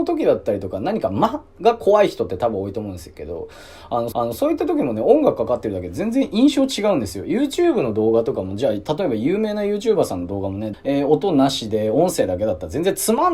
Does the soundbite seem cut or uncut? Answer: cut